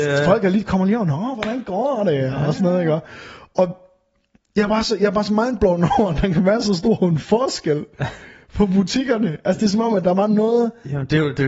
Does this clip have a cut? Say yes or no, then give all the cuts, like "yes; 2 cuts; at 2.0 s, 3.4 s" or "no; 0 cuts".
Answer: no; 0 cuts